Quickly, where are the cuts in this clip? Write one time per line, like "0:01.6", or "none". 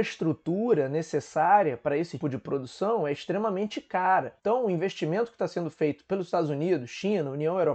0:02.2
0:04.4

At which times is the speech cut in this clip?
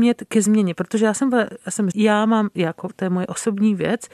0:01.9

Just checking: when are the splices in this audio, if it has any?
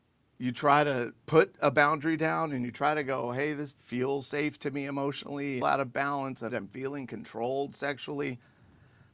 0:01.2
0:03.7
0:05.6
0:06.5

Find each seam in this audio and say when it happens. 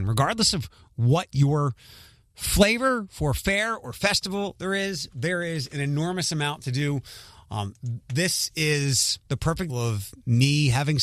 0:09.2
0:09.7

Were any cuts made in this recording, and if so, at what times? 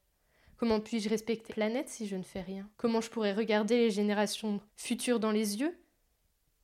0:01.5
0:02.7
0:04.7

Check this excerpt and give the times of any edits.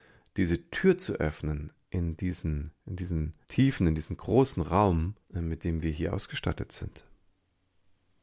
0:03.4
0:05.2

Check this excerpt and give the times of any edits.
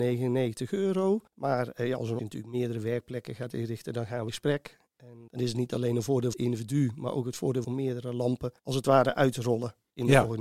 0:01.3
0:02.2
0:04.3
0:05.3
0:06.3
0:07.6
0:08.6

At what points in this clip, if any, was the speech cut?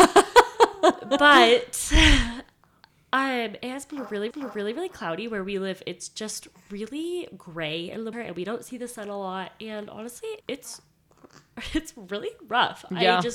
0:04.3
0:08.1
0:10.4

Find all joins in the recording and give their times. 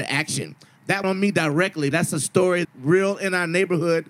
0:01.0
0:01.9
0:02.6

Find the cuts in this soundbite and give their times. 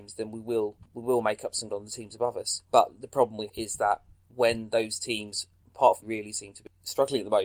0:01.7
0:03.5
0:06.0

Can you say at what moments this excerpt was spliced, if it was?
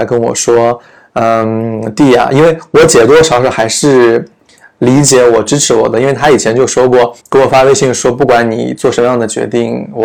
0:07.2

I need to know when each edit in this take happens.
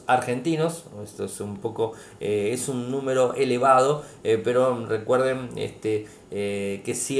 none

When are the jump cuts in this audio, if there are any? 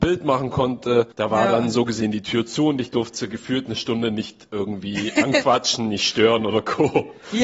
0:01.1

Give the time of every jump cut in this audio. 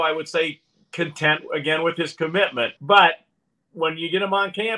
0:02.8

